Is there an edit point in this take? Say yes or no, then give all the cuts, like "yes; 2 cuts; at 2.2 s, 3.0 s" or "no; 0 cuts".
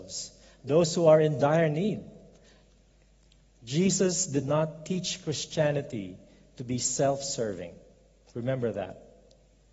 no; 0 cuts